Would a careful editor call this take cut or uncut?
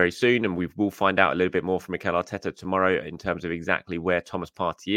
uncut